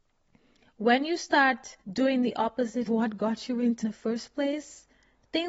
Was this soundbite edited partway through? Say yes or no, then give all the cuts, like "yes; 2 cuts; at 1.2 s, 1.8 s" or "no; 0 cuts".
yes; 3 cuts; at 1.8 s, 2.9 s, 3.8 s